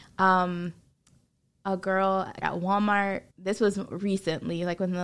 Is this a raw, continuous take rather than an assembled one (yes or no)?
no